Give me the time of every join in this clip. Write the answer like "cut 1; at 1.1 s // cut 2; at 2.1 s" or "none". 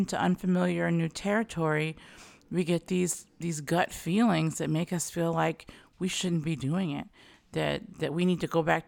none